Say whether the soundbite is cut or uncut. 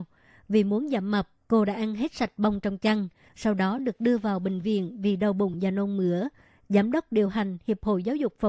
uncut